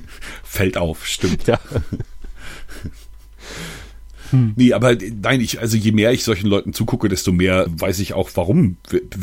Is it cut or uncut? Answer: cut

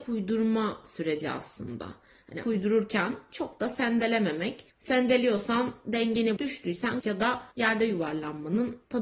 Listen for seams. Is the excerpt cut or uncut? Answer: cut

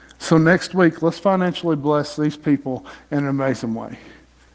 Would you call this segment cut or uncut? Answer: uncut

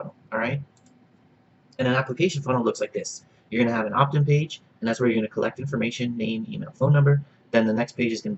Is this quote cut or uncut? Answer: uncut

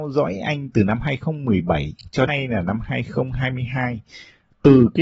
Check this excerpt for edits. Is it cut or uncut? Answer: cut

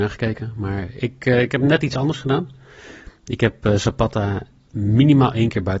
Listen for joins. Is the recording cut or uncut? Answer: uncut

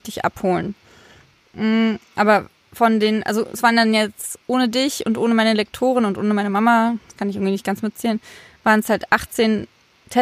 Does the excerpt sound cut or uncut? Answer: uncut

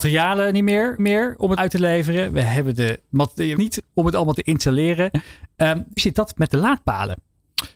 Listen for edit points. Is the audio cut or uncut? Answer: cut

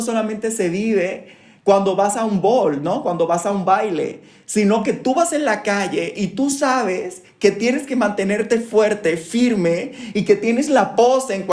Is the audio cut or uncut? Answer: uncut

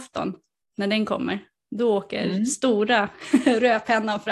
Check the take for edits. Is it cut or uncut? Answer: uncut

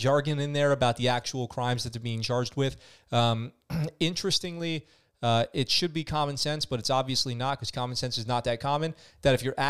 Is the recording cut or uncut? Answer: uncut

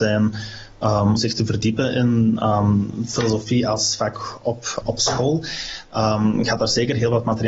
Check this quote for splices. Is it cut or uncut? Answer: cut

